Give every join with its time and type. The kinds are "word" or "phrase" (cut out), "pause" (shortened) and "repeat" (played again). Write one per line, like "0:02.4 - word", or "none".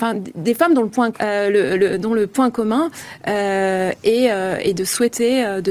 0:01.1 - word